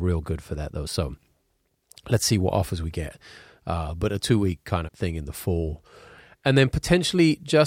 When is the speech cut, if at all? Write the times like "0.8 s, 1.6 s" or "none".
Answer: 4.9 s